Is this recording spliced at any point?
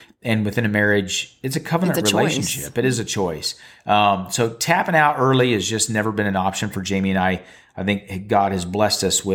no; 0 cuts

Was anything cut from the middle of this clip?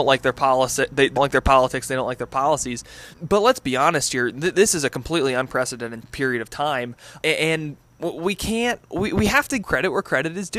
yes; 6 cuts; at 1.2 s, 3.1 s, 6.0 s, 7.2 s, 8.8 s, 9.6 s

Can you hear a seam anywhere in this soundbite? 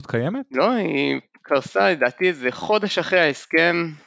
no; 0 cuts

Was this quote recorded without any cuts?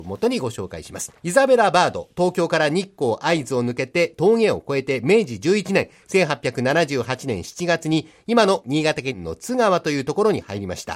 no; 1 cut; at 1.2 s

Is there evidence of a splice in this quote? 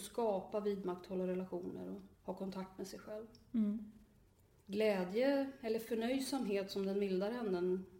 yes; 1 cut; at 2.1 s

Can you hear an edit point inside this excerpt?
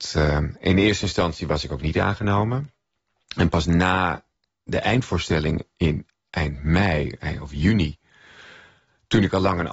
no; 0 cuts

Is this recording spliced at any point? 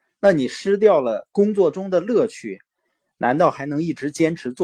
no; 0 cuts

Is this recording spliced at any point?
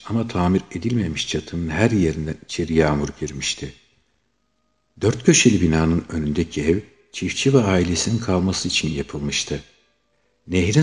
no; 0 cuts

